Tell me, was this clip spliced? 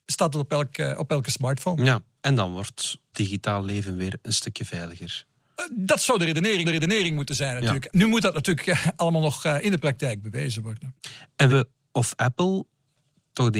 yes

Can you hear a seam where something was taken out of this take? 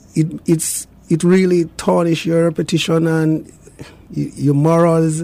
no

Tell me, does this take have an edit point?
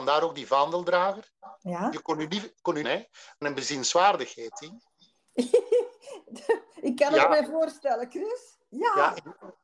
yes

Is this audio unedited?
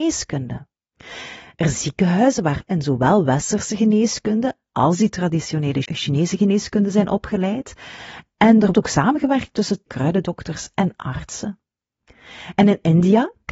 no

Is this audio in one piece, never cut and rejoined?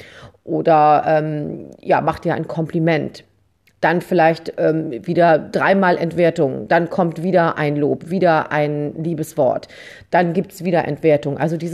yes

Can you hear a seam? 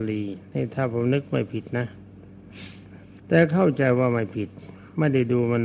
yes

